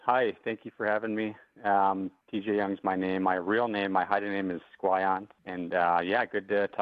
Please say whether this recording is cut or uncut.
cut